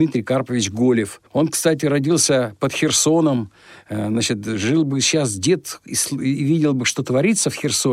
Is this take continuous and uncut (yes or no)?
no